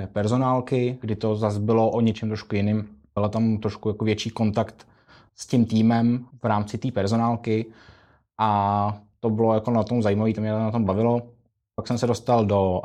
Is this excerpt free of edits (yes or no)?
yes